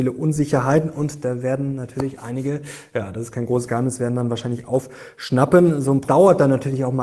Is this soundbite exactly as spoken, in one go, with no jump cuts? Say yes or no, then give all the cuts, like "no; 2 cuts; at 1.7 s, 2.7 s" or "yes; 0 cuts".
no; 1 cut; at 6.1 s